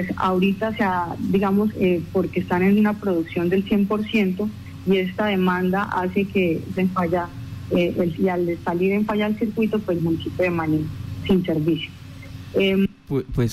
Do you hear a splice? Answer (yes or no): yes